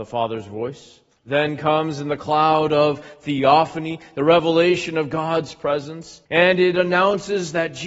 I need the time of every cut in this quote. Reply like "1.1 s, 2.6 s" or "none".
1.1 s, 6.2 s